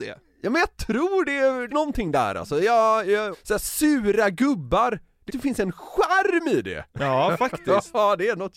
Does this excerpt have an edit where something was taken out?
yes; 4 cuts; at 1.7 s, 3.3 s, 5.3 s, 6.9 s

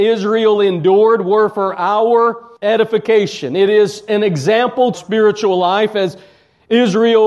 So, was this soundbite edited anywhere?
yes; 2 cuts; at 2.6 s, 4.9 s

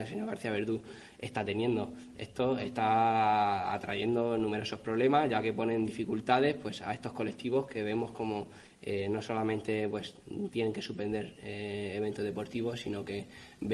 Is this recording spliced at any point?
no; 0 cuts

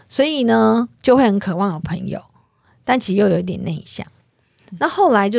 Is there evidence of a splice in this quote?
no; 0 cuts

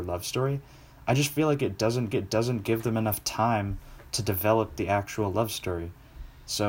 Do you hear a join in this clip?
yes; 1 cut; at 2.1 s

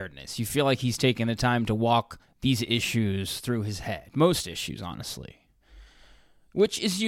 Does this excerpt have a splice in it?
yes; 1 cut; at 2.2 s

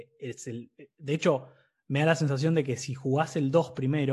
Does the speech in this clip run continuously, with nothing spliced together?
yes; 0 cuts

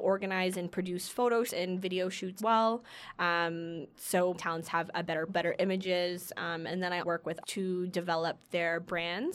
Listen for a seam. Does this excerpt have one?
yes; 6 cuts; at 1.5 s, 2.4 s, 4.3 s, 5.3 s, 7.0 s, 7.4 s

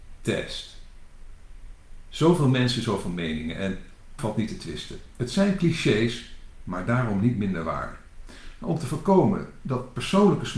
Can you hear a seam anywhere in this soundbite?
yes; 1 cut; at 4.2 s

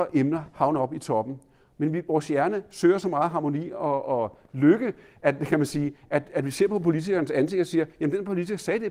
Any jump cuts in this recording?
no; 0 cuts

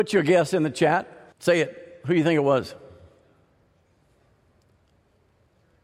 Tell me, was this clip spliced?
yes; 1 cut; at 1.3 s

